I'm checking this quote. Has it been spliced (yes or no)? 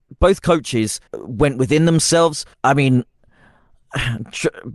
yes